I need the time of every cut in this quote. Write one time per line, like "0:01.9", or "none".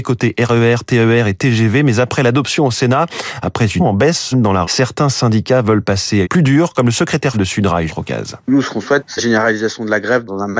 0:03.8
0:04.3
0:04.6
0:06.2
0:07.3
0:07.9
0:08.4
0:09.2